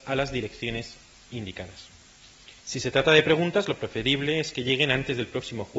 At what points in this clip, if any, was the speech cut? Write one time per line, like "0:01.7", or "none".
0:02.6